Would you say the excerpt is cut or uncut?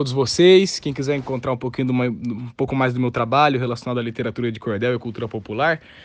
uncut